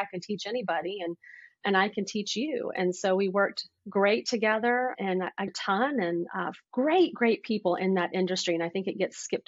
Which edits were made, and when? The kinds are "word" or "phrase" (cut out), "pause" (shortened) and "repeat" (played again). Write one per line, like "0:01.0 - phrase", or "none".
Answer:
0:03.8 - pause
0:04.9 - word
0:05.5 - phrase
0:06.6 - pause